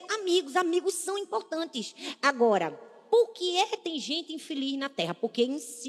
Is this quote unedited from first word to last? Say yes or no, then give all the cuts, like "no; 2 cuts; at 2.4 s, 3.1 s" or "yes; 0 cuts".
no; 1 cut; at 3.8 s